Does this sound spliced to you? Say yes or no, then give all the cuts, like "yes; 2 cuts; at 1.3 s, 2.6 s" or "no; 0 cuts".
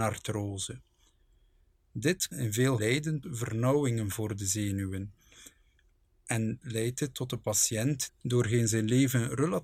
yes; 5 cuts; at 2.3 s, 2.8 s, 3.2 s, 6.6 s, 8.1 s